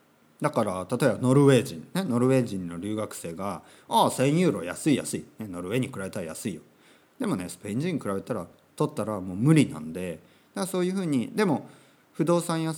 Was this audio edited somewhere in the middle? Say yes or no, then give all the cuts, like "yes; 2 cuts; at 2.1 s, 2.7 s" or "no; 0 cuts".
no; 0 cuts